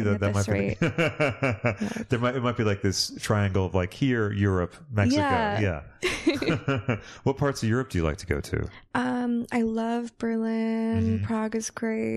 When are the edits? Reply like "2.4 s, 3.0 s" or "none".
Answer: none